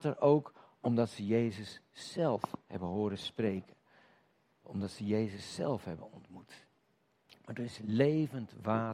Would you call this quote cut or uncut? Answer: uncut